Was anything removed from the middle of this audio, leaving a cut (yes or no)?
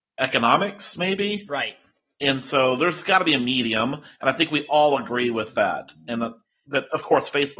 no